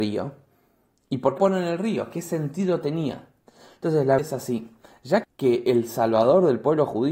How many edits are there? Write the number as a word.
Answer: three